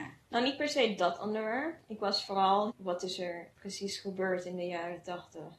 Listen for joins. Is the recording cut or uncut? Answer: cut